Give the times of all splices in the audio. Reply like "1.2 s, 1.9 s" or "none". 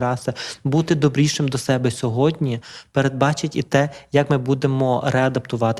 none